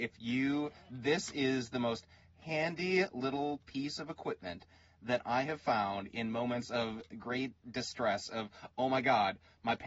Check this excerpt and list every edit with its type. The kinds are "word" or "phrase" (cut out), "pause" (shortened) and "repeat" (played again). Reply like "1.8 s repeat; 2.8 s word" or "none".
none